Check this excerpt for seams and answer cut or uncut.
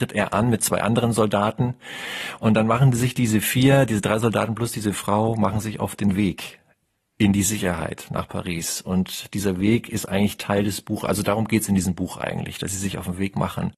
uncut